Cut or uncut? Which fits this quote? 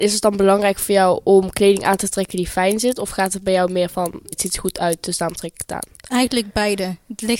cut